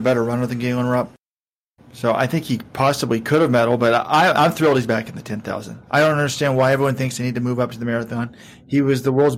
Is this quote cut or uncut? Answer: uncut